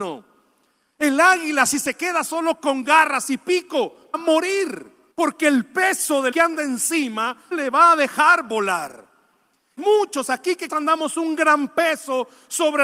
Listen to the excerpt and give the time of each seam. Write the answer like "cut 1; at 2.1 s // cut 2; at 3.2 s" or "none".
cut 1; at 4.1 s // cut 2; at 5.1 s // cut 3; at 6.3 s // cut 4; at 7.5 s // cut 5; at 9.8 s // cut 6; at 10.7 s